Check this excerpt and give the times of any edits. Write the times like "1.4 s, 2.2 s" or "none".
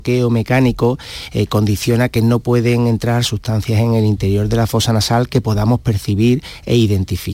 none